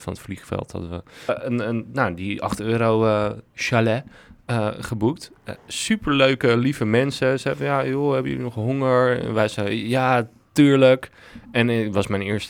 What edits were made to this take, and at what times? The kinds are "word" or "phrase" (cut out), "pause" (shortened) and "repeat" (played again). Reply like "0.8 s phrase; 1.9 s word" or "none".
1.3 s word